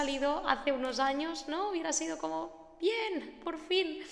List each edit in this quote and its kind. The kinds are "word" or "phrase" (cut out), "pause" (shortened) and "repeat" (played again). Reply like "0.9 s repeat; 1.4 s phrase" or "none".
none